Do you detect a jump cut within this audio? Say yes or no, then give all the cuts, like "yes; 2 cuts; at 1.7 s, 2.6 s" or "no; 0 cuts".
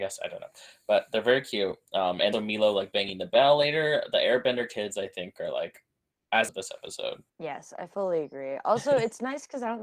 yes; 3 cuts; at 2.3 s, 6.5 s, 7.3 s